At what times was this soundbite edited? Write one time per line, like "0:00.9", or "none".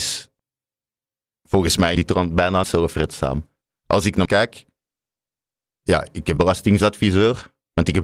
0:02.0
0:02.6
0:04.3
0:06.4